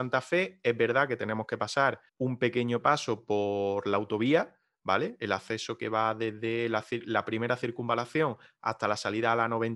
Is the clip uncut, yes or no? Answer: no